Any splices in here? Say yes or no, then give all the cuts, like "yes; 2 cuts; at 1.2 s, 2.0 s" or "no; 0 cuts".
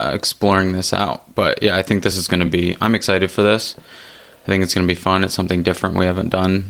no; 0 cuts